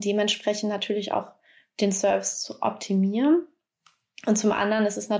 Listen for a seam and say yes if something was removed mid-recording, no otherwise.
no